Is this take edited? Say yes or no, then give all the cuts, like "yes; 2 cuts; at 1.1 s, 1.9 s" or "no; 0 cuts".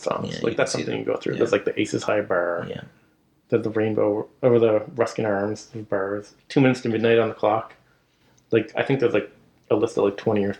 no; 0 cuts